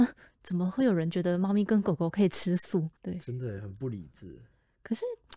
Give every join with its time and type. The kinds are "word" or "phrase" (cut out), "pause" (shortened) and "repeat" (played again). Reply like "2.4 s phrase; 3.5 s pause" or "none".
3.0 s pause